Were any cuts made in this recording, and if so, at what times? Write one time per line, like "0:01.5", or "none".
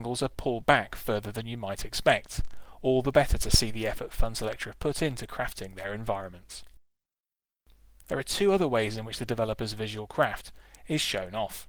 none